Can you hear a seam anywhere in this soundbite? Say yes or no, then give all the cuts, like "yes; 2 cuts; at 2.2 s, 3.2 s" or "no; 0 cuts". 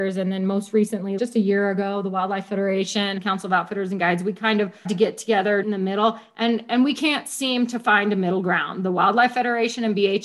yes; 4 cuts; at 1.2 s, 3.2 s, 4.8 s, 5.6 s